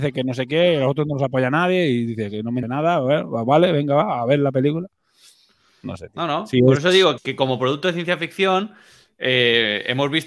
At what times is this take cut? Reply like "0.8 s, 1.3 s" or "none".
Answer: 2.6 s, 7.2 s